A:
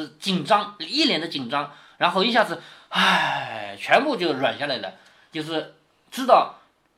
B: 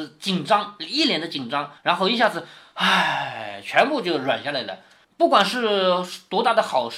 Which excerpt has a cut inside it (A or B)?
B